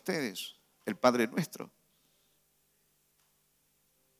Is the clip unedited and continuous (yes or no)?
yes